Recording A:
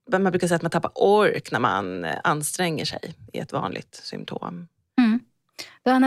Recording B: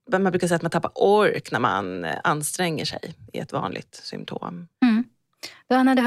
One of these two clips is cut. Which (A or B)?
B